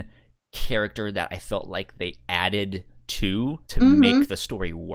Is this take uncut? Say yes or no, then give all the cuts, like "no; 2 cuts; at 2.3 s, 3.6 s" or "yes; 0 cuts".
no; 1 cut; at 3.6 s